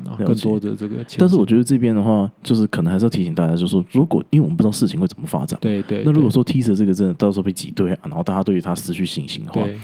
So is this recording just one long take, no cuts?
no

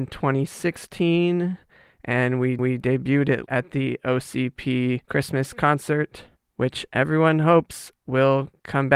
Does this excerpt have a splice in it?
yes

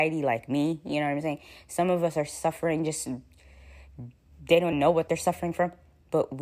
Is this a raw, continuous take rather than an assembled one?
no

